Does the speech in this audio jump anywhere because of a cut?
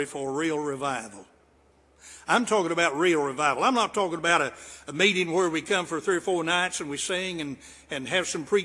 no; 0 cuts

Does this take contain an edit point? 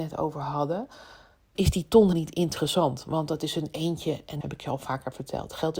yes; 3 cuts; at 1.6 s, 2.1 s, 4.4 s

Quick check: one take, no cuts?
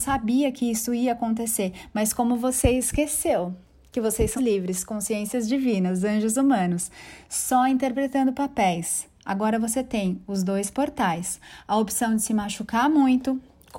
no; 1 cut; at 4.4 s

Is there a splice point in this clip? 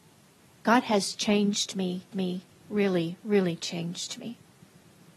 yes; 1 cut; at 2.1 s

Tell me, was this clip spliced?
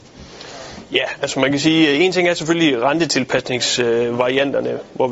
no; 0 cuts

